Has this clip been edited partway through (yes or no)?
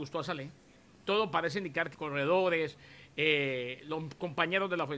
yes